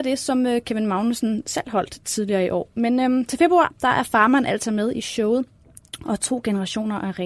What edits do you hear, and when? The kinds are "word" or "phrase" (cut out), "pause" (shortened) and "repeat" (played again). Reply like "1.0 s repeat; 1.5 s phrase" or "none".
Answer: none